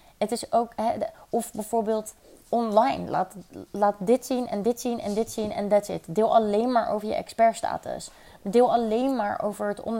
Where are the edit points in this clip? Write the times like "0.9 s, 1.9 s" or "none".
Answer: none